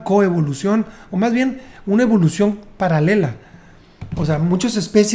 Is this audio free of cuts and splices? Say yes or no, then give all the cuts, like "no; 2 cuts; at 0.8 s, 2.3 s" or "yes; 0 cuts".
yes; 0 cuts